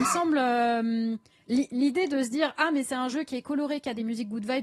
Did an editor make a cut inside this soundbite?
no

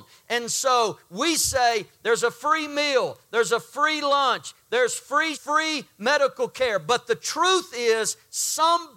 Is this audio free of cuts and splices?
no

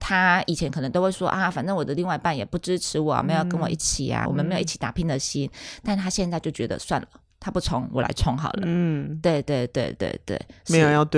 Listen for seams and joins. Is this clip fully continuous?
no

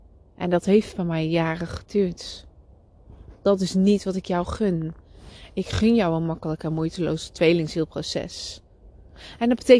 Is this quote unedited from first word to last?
yes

